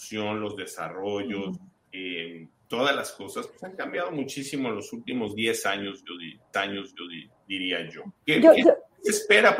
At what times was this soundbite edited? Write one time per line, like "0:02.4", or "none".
0:02.5
0:06.5
0:08.2